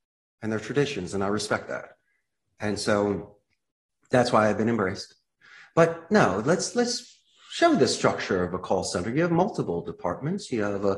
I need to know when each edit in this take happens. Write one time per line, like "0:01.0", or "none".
none